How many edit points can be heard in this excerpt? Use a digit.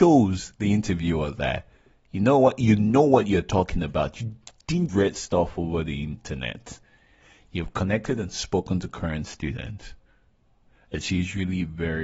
1